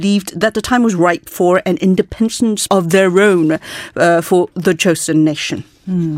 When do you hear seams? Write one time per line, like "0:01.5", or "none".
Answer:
0:02.7